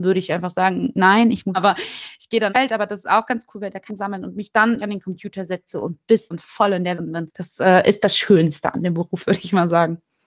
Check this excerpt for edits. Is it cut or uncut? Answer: cut